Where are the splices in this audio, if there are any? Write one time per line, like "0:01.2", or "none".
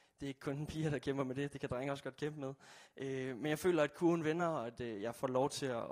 none